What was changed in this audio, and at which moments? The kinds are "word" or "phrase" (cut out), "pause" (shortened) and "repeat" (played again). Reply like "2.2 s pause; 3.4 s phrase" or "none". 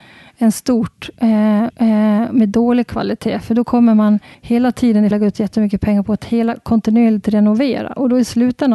1.7 s repeat; 4.3 s pause; 5.1 s phrase